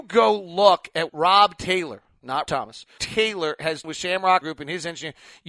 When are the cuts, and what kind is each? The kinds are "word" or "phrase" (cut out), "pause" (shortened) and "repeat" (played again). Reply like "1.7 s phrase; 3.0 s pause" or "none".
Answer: 1.1 s word; 2.5 s word; 3.0 s word; 3.8 s word; 4.4 s word